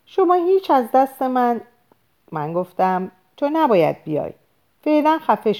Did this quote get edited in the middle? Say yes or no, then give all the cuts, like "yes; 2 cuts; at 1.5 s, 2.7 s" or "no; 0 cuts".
no; 0 cuts